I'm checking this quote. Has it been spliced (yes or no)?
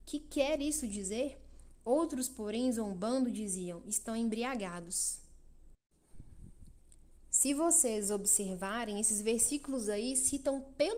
no